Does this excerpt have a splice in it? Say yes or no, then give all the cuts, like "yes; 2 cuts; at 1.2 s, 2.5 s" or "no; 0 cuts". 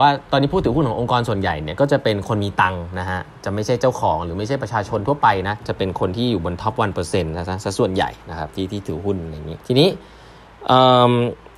yes; 1 cut; at 9.6 s